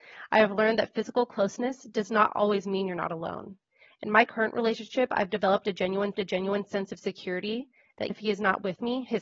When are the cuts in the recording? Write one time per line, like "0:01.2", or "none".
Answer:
0:06.1
0:08.1